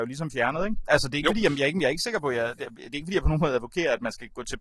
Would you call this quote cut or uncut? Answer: uncut